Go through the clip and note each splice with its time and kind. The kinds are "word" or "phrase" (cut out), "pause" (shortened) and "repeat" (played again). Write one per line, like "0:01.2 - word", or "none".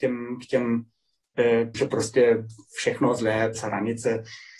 0:01.7 - word
0:03.5 - word